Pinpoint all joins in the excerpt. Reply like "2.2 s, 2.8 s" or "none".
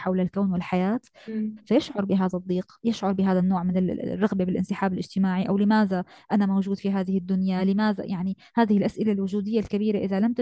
none